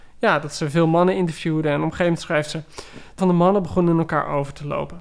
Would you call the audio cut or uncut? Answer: cut